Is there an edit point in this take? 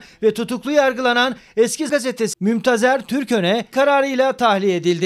yes; 3 cuts; at 1.9 s, 2.3 s, 3.7 s

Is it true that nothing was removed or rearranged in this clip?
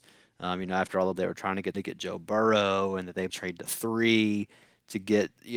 no; 3 cuts; at 1.2 s, 1.7 s, 3.3 s

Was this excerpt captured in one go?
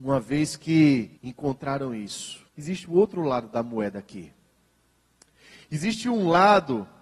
no; 2 cuts; at 1.2 s, 2.5 s

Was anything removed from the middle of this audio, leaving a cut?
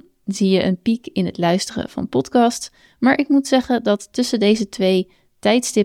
no; 0 cuts

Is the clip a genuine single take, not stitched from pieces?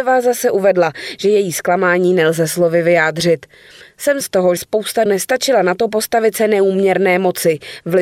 no; 3 cuts; at 4.2 s, 4.6 s, 5.1 s

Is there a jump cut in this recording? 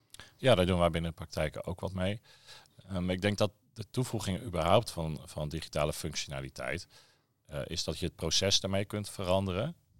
no; 0 cuts

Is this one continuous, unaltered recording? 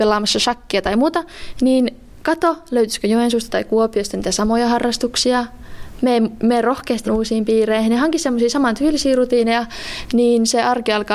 no; 1 cut; at 7.1 s

